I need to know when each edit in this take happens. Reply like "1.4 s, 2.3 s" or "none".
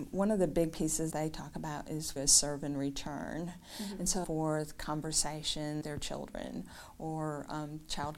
1.1 s, 2.2 s, 4.2 s, 5.8 s

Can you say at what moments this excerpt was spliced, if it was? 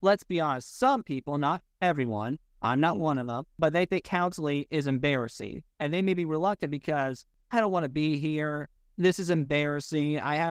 none

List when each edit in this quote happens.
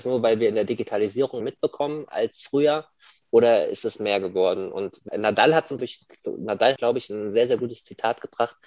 1.4 s, 5.1 s, 5.8 s, 6.8 s

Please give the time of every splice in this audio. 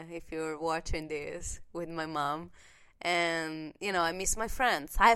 none

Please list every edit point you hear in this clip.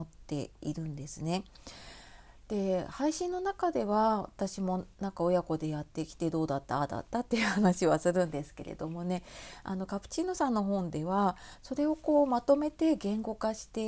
4.9 s

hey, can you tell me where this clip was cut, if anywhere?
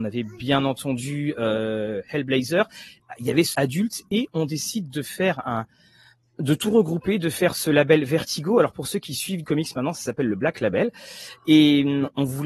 3.5 s, 9.4 s

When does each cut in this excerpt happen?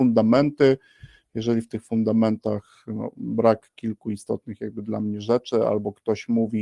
none

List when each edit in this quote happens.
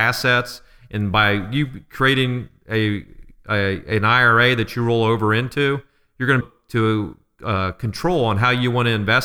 6.4 s

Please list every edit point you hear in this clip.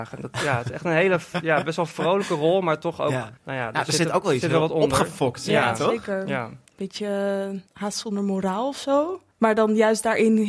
3.4 s, 6.7 s, 7.7 s, 9.3 s

